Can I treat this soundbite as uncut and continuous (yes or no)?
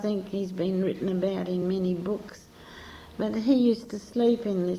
yes